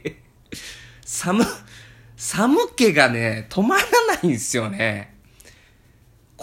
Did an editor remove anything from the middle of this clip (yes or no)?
no